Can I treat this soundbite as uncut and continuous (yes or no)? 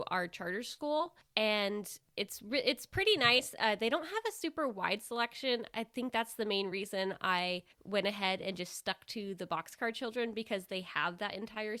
yes